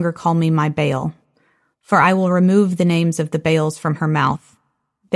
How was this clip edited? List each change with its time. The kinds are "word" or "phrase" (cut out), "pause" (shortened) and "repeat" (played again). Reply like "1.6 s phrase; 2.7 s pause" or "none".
none